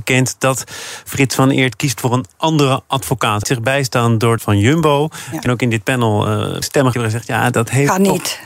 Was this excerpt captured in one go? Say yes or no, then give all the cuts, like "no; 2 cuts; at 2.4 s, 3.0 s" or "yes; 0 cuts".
no; 5 cuts; at 3.4 s, 4.4 s, 5.5 s, 6.6 s, 6.9 s